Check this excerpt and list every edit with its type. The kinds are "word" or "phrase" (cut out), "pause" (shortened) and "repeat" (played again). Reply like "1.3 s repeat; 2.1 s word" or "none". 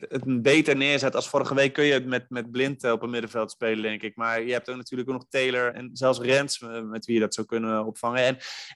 5.7 s word